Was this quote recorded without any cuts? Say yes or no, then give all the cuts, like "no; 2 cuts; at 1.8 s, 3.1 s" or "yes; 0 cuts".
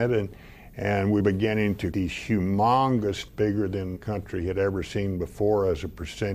no; 4 cuts; at 1.2 s, 1.9 s, 3.3 s, 4.0 s